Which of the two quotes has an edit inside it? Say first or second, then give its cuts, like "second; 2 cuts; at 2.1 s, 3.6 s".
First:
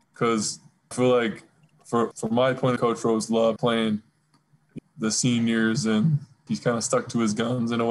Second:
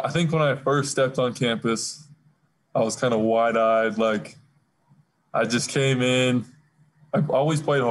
first; 6 cuts; at 0.9 s, 2.1 s, 2.8 s, 3.6 s, 4.8 s, 6.5 s